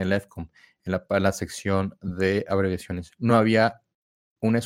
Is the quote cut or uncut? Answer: uncut